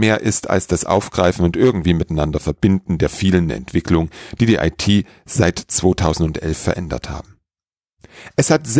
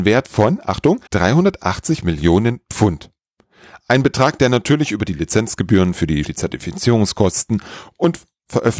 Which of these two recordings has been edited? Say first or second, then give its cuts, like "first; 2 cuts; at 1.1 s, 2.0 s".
second; 2 cuts; at 1.1 s, 6.2 s